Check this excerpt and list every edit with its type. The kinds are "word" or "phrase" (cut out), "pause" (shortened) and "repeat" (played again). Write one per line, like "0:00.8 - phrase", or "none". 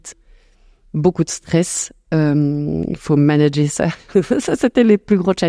none